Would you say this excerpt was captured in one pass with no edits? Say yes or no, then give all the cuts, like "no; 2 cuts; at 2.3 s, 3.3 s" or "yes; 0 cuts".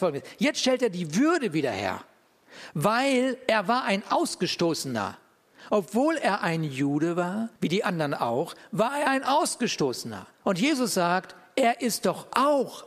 no; 2 cuts; at 7.6 s, 10.3 s